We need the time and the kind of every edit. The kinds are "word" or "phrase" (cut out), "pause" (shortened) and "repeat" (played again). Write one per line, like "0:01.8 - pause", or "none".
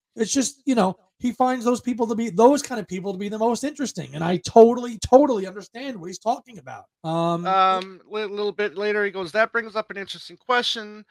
0:06.9 - pause